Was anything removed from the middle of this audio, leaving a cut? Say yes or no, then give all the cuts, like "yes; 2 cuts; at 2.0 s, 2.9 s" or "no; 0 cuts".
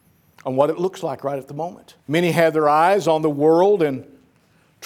yes; 1 cut; at 2.0 s